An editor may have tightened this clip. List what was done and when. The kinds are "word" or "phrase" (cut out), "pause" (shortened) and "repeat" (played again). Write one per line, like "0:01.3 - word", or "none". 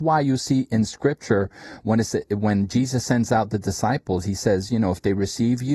none